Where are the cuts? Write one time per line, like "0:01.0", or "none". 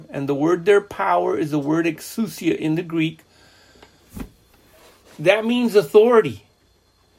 none